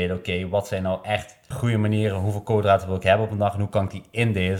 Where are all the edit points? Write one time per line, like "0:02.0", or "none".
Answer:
0:01.5

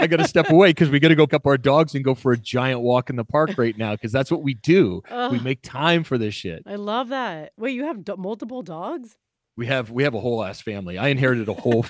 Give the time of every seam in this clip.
0:01.3

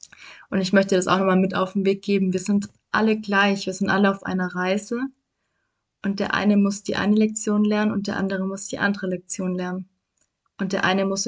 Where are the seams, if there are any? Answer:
none

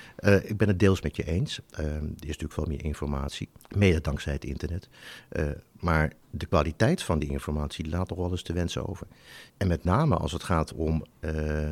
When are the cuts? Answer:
0:03.6
0:06.2
0:09.5

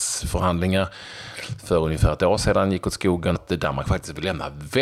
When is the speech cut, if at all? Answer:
0:03.3

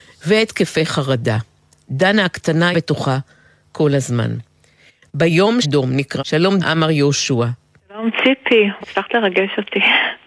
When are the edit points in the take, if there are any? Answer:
0:02.7
0:05.6
0:06.2
0:06.6
0:08.8

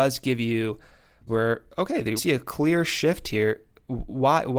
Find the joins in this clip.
0:01.3
0:02.2

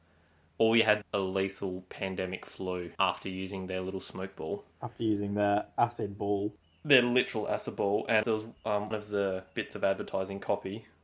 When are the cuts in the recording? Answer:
0:01.0
0:02.9
0:04.7
0:08.2
0:08.9

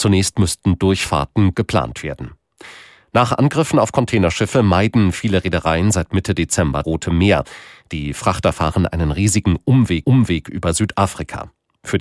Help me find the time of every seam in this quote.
0:01.5
0:06.8
0:10.0

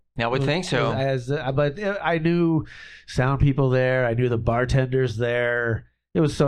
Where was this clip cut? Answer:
none

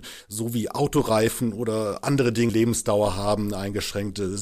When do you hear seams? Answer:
0:02.5

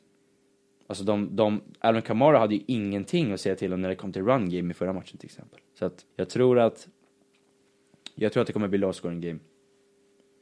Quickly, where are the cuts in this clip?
0:05.7
0:06.1

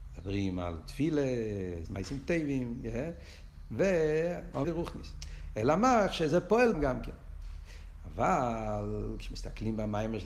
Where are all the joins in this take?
0:01.9
0:04.6
0:06.7

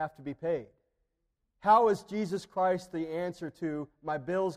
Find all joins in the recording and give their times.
none

